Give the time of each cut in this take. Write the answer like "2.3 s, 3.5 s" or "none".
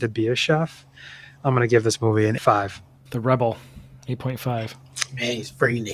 2.4 s